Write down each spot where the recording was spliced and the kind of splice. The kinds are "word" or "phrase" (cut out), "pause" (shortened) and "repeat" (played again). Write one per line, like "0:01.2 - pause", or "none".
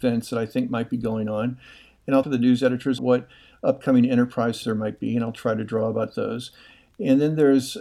0:02.2 - word
0:03.0 - word
0:04.6 - word